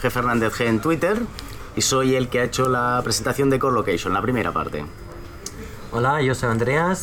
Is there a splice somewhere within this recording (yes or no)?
no